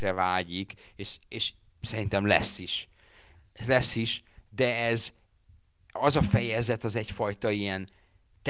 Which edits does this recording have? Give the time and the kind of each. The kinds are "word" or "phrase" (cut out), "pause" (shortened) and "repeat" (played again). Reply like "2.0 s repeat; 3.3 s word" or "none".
none